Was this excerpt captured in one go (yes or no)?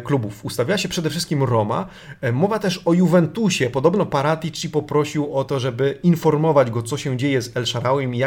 yes